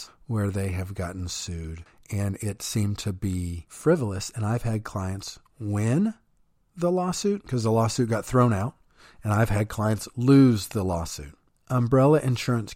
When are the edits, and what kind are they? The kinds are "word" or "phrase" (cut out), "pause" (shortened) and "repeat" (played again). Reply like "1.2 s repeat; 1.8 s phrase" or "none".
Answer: none